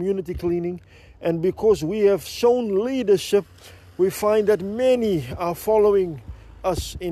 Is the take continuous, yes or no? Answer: yes